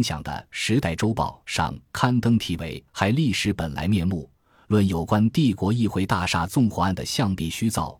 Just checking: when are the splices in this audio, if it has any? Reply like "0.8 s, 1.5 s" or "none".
2.9 s